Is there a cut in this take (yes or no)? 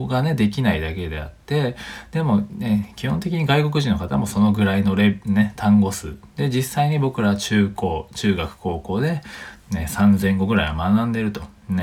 no